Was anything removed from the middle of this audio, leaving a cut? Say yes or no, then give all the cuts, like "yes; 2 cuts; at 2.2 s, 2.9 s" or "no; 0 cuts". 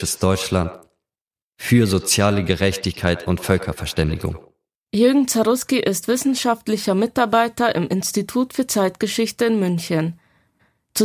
yes; 1 cut; at 4.7 s